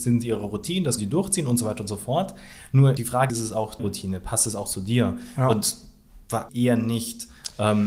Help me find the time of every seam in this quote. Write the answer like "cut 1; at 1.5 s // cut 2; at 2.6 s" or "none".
cut 1; at 1.0 s // cut 2; at 3.0 s // cut 3; at 3.3 s // cut 4; at 3.8 s // cut 5; at 6.5 s